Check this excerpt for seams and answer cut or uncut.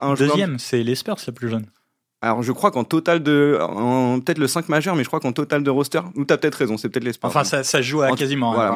uncut